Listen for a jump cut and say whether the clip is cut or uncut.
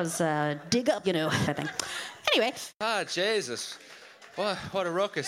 cut